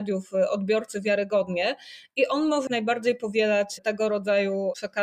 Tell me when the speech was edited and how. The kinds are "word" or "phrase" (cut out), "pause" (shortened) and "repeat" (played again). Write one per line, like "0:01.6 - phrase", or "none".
0:02.7 - word